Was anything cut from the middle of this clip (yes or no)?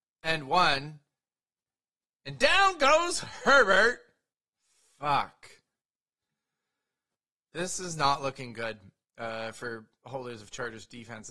no